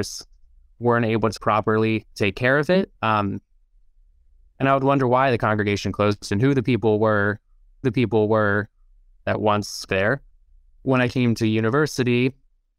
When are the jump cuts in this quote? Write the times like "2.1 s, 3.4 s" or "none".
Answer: 1.4 s, 2.1 s, 3.0 s, 7.8 s, 9.9 s